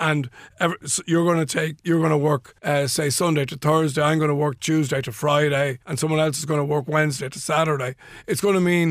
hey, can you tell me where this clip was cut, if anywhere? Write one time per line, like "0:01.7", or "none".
0:02.6
0:05.8